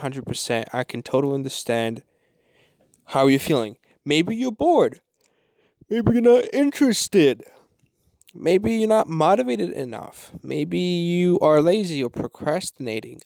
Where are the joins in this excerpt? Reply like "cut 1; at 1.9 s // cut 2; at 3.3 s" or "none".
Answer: none